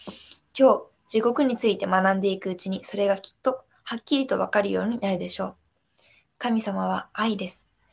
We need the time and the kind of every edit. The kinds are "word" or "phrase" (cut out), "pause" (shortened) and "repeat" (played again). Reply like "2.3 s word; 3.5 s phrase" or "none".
none